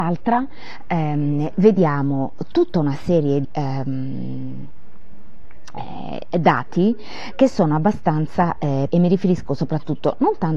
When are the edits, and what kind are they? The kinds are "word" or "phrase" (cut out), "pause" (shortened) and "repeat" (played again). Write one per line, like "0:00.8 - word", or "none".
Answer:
0:03.4 - word
0:08.9 - word